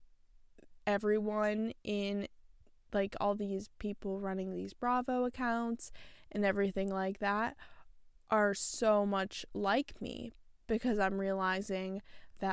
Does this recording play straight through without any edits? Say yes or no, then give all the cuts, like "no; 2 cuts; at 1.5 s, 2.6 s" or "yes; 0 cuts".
yes; 0 cuts